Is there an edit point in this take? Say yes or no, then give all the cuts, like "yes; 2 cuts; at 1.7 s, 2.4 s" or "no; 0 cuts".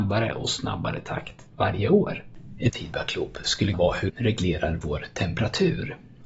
yes; 4 cuts; at 1.5 s, 2.7 s, 3.7 s, 4.1 s